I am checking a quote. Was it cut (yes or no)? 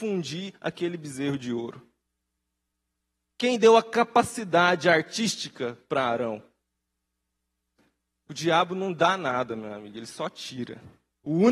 no